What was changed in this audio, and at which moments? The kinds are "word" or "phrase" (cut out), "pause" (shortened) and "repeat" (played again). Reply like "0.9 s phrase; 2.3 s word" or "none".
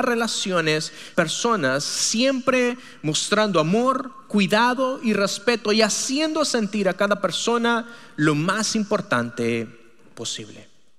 1.1 s phrase

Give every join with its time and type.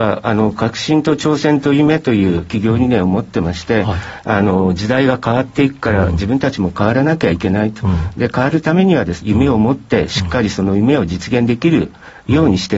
9.2 s word

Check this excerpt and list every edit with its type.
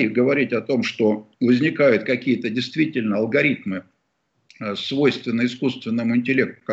1.3 s pause

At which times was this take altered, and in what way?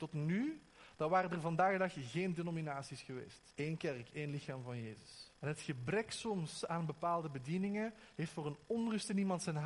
3.5 s pause; 5.3 s pause

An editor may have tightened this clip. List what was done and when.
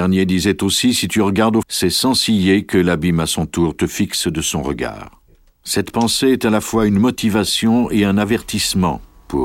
1.6 s phrase; 5.3 s pause

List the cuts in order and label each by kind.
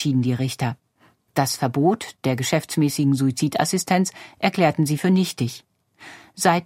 none

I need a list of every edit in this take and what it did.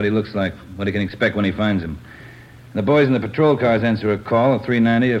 none

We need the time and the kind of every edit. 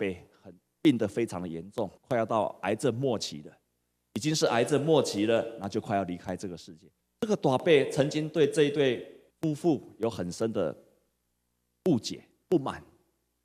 2.0 s pause; 7.0 s pause; 9.3 s pause

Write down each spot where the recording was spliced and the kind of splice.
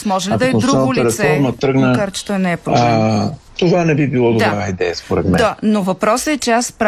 3.5 s pause

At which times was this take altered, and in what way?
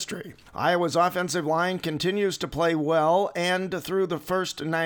none

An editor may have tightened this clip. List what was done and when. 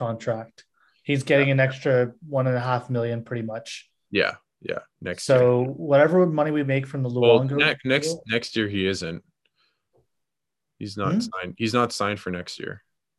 none

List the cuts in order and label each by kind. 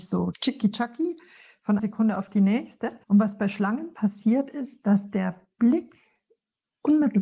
1.8 s word; 3.0 s pause

